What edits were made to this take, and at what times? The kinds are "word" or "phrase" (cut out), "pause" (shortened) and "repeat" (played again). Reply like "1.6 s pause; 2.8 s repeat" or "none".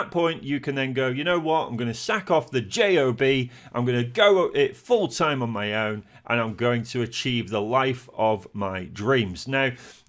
none